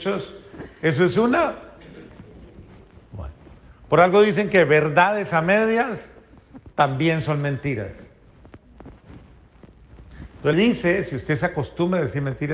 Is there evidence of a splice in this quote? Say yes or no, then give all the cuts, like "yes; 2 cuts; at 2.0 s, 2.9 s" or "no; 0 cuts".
yes; 2 cuts; at 6.7 s, 10.5 s